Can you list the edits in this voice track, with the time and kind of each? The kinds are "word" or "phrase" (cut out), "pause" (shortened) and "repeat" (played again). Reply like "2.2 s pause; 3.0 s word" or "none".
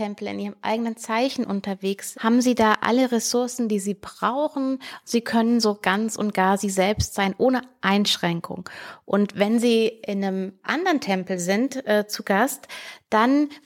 2.1 s phrase